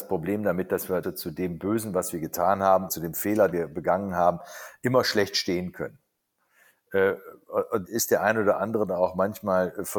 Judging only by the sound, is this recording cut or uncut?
cut